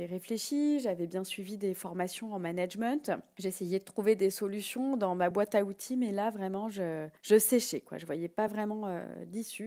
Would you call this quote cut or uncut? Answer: uncut